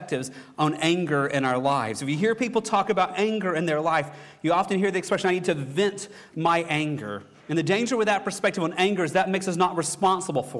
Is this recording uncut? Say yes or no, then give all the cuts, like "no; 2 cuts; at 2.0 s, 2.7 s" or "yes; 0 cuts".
yes; 0 cuts